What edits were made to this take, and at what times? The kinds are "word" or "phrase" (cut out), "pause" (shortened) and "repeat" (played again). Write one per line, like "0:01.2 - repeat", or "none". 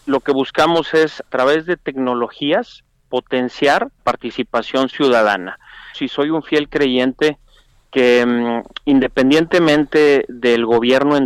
0:01.3 - word
0:04.0 - word
0:05.9 - word